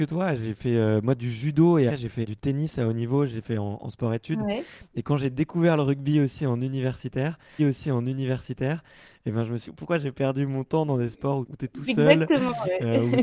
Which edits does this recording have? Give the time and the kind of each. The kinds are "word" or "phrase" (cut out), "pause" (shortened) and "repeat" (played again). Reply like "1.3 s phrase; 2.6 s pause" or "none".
1.9 s word; 2.2 s word; 7.6 s repeat; 9.6 s phrase; 11.4 s word